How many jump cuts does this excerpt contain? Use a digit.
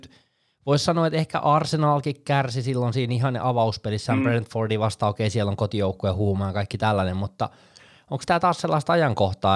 0